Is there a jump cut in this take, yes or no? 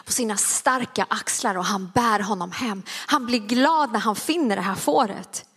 no